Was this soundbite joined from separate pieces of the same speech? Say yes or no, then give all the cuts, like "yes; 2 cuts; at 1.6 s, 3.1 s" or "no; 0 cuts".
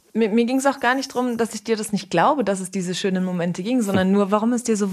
no; 0 cuts